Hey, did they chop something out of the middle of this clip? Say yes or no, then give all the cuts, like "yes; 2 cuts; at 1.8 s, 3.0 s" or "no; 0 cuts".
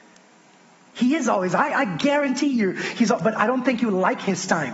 no; 0 cuts